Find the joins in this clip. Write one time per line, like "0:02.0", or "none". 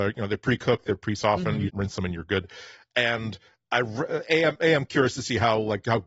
0:01.7